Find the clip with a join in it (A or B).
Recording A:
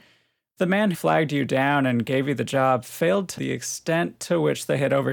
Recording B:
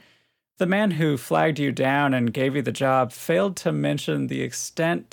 A